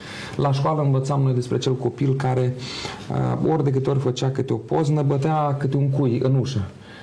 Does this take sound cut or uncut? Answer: uncut